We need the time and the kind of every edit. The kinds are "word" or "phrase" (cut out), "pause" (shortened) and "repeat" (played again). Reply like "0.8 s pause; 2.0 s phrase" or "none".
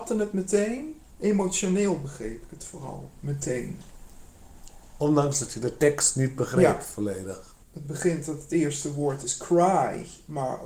7.6 s pause